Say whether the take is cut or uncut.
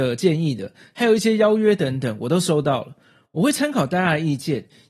uncut